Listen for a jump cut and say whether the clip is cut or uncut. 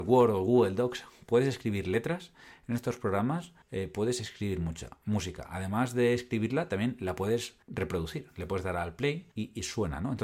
cut